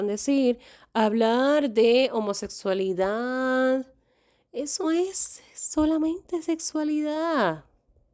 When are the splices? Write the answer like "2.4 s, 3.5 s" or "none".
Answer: 4.8 s